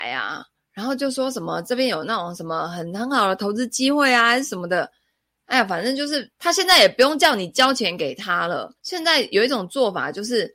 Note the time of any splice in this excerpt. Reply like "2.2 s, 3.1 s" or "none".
6.3 s, 8.8 s